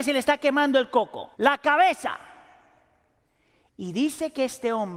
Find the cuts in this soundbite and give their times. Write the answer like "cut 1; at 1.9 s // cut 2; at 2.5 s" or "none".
cut 1; at 1.3 s

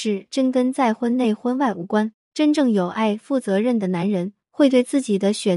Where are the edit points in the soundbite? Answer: cut 1; at 2.2 s

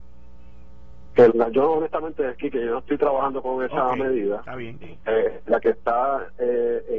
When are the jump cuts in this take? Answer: cut 1; at 1.3 s // cut 2; at 4.8 s

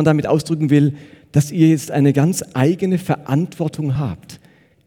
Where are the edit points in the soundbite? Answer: none

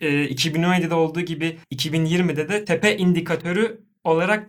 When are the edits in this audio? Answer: cut 1; at 1.6 s

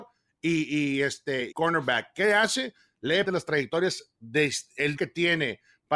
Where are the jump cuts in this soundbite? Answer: cut 1; at 1.5 s // cut 2; at 3.2 s // cut 3; at 5.0 s

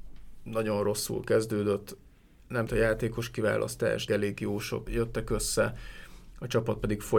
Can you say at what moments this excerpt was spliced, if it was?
cut 1; at 2.7 s // cut 2; at 4.1 s // cut 3; at 4.9 s

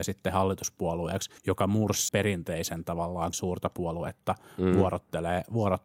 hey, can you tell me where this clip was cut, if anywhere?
cut 1; at 1.4 s // cut 2; at 2.1 s // cut 3; at 3.3 s

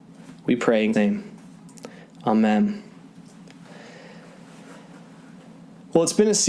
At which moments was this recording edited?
cut 1; at 0.9 s

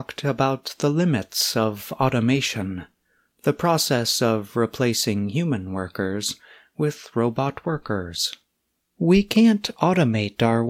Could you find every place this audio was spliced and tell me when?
none

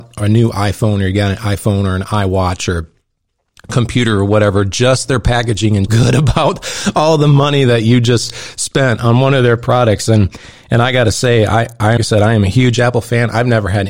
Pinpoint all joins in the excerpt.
cut 1; at 5.9 s // cut 2; at 12.0 s

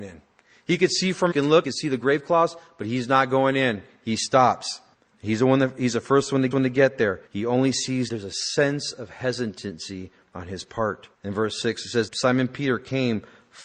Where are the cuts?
cut 1; at 1.3 s // cut 2; at 1.6 s // cut 3; at 4.9 s // cut 4; at 6.5 s // cut 5; at 7.3 s // cut 6; at 8.1 s // cut 7; at 11.1 s // cut 8; at 12.1 s

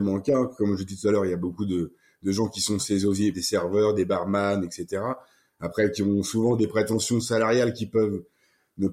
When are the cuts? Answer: cut 1; at 3.3 s

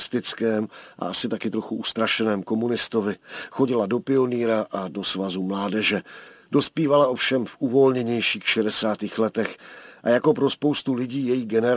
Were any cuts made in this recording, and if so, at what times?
none

